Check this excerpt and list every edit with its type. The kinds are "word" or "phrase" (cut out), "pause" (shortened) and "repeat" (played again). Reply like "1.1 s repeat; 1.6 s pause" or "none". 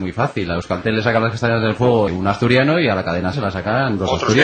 2.1 s word; 3.3 s word